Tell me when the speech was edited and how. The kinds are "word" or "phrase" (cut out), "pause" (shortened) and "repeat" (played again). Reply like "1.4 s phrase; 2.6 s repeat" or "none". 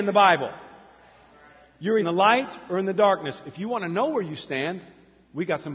2.0 s phrase

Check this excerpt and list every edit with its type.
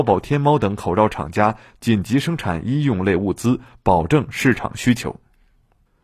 none

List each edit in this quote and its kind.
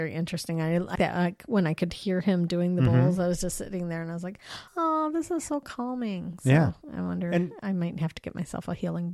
0.9 s word; 4.7 s pause

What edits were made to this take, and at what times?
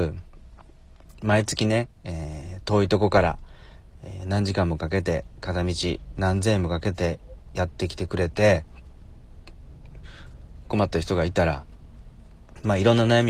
none

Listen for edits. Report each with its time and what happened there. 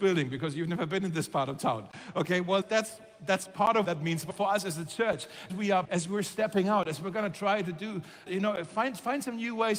2.6 s word; 3.8 s word; 4.3 s word; 5.5 s word; 5.8 s word; 8.3 s word

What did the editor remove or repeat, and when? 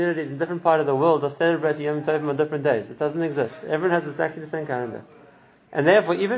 none

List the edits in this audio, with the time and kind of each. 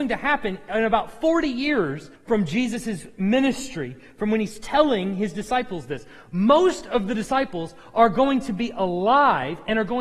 2.2 s pause

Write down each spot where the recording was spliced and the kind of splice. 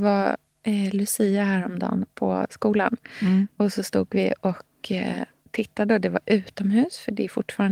none

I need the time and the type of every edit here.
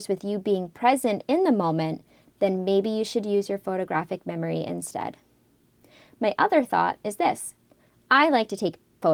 none

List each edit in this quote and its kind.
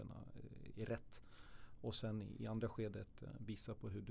none

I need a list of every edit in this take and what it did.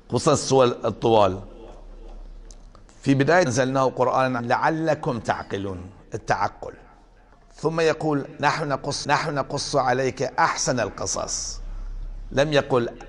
3.5 s phrase; 4.4 s word; 7.3 s pause; 9.0 s repeat

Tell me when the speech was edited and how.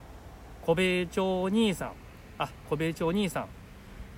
none

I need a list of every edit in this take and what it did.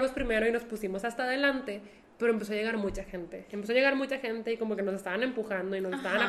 none

